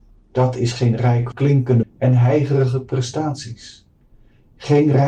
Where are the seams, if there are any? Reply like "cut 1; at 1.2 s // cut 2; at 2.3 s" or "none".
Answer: cut 1; at 1.3 s // cut 2; at 1.8 s